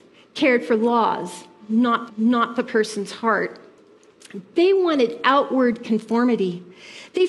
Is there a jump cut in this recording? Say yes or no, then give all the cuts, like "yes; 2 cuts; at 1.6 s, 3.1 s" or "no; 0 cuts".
yes; 1 cut; at 2.1 s